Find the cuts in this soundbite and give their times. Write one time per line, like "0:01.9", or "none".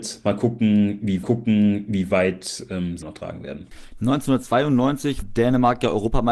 0:01.2
0:03.0
0:05.2